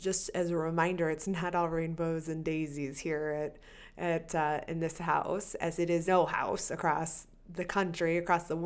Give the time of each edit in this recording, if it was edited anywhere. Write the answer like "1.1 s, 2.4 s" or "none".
6.1 s